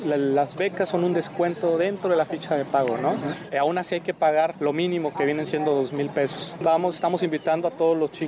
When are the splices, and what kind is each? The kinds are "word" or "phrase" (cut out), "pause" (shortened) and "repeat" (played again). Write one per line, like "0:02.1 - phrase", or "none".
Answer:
none